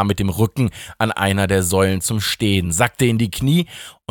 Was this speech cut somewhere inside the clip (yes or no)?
no